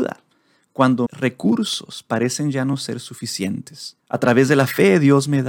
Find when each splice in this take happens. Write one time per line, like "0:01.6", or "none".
0:01.1
0:04.0